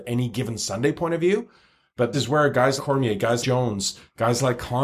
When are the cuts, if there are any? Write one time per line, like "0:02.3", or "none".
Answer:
0:02.1
0:02.8
0:03.4